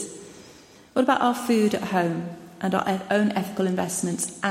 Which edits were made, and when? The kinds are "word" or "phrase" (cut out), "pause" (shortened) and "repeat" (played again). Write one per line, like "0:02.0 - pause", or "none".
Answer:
none